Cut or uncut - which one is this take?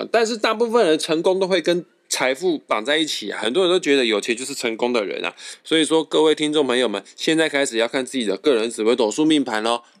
uncut